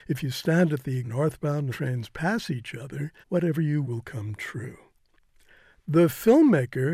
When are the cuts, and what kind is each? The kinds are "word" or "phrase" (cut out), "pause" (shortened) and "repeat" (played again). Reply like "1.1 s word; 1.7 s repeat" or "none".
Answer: 1.0 s phrase; 1.7 s phrase; 3.2 s pause; 3.8 s word